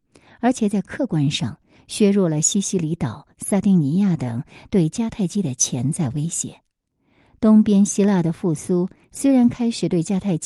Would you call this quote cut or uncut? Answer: uncut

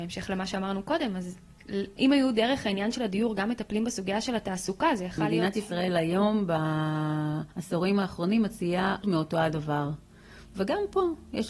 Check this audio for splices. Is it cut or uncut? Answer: cut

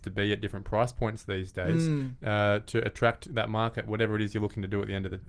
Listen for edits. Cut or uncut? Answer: uncut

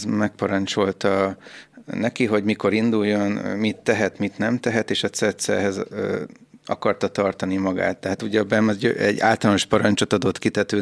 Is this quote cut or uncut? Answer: uncut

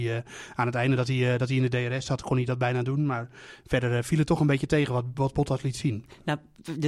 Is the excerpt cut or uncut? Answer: uncut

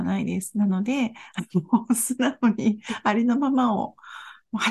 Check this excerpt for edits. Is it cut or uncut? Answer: uncut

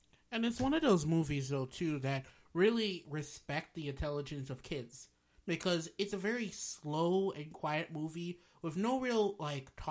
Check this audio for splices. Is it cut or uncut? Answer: uncut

